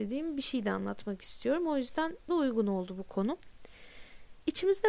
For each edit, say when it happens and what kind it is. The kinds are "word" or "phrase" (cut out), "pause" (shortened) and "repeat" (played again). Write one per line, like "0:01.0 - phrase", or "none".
0:02.3 - word